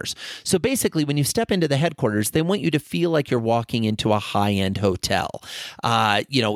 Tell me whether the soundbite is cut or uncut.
uncut